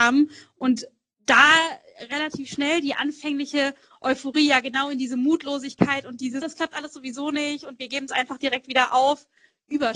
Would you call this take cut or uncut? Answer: cut